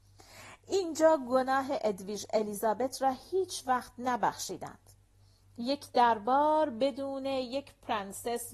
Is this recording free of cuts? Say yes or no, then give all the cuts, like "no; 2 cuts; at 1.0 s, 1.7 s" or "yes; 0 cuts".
yes; 0 cuts